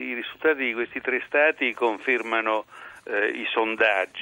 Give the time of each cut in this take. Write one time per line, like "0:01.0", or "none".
none